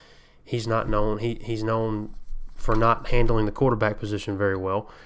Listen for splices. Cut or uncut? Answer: uncut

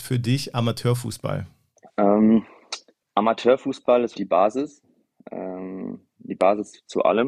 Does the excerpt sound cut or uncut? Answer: cut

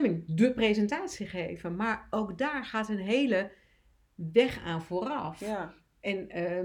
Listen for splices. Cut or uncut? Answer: uncut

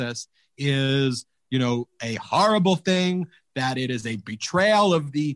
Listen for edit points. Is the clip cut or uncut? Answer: uncut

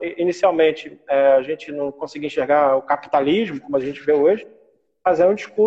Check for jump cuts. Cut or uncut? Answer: uncut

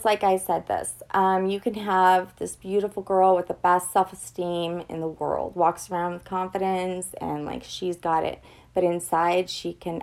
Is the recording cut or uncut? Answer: uncut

